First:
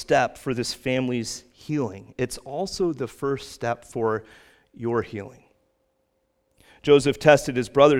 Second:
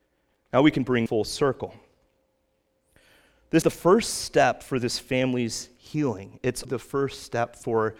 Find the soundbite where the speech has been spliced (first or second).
second